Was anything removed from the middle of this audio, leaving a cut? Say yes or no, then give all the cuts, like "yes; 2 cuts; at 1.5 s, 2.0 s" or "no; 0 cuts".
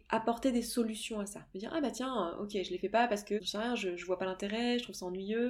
no; 0 cuts